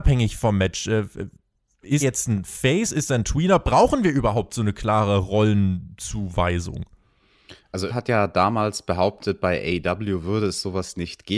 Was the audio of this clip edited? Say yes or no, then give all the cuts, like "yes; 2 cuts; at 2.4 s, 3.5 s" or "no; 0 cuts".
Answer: yes; 2 cuts; at 2.0 s, 7.9 s